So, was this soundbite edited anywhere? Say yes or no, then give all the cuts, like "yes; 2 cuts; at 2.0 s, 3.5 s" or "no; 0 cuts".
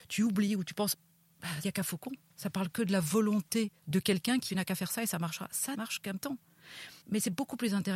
yes; 8 cuts; at 0.9 s, 1.6 s, 2.2 s, 3.8 s, 4.5 s, 5.7 s, 6.2 s, 7.0 s